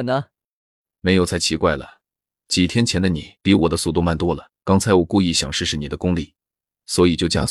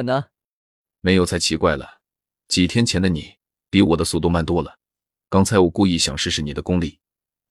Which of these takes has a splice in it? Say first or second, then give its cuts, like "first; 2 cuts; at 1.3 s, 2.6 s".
first; 2 cuts; at 3.4 s, 4.6 s